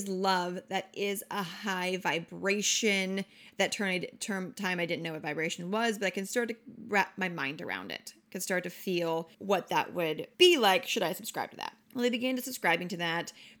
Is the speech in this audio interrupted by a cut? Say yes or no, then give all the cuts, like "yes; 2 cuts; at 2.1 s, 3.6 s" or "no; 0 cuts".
yes; 3 cuts; at 9.3 s, 10.3 s, 11.8 s